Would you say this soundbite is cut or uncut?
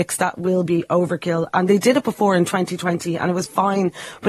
uncut